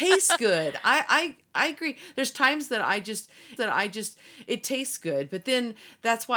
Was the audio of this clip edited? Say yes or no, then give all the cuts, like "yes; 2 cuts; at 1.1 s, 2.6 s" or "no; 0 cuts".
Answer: yes; 1 cut; at 3.6 s